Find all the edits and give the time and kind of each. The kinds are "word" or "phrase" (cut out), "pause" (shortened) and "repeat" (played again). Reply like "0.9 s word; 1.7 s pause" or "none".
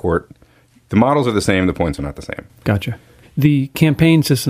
2.0 s word; 3.2 s pause